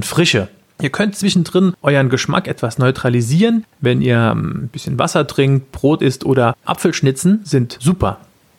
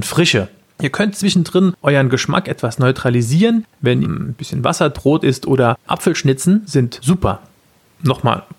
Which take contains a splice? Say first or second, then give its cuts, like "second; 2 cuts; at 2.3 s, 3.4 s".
second; 2 cuts; at 4.0 s, 4.9 s